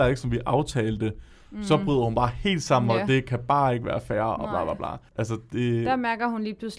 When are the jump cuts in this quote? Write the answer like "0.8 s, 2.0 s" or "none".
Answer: none